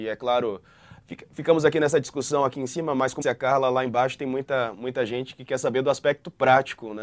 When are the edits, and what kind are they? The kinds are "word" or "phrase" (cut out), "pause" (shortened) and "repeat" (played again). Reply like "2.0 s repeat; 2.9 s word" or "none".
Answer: 3.2 s word